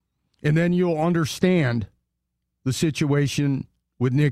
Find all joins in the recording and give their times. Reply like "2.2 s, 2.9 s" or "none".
none